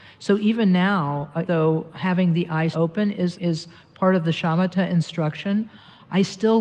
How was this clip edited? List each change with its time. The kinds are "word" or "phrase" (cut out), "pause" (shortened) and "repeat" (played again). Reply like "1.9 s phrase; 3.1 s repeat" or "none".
1.5 s word; 2.7 s word; 3.3 s word